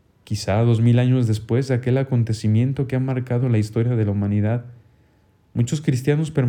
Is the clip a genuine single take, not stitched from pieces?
yes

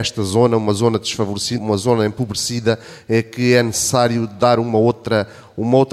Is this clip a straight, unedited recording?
no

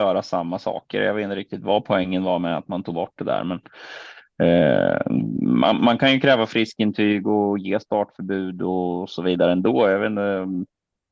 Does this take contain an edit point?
no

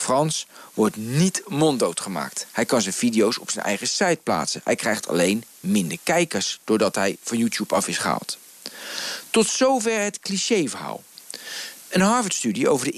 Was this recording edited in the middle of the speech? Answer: no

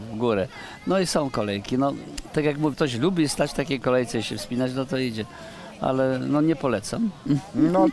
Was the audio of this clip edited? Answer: yes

